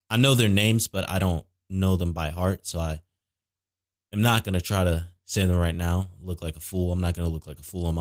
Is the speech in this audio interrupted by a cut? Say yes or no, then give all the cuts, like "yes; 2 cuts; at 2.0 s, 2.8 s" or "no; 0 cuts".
no; 0 cuts